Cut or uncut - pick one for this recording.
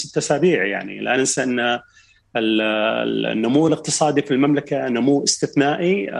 uncut